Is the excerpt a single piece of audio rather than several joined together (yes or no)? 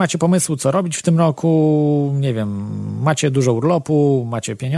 yes